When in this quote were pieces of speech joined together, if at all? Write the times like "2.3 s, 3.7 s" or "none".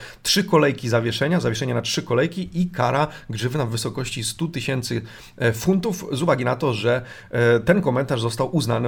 none